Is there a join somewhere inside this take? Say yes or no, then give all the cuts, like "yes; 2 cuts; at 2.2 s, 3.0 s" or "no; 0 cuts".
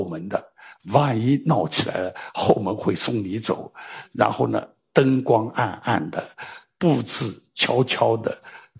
no; 0 cuts